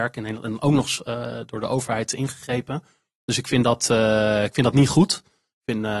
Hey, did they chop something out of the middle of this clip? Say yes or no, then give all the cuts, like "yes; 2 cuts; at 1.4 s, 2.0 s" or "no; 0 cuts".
no; 0 cuts